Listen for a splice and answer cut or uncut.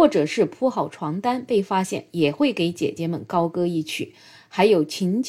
uncut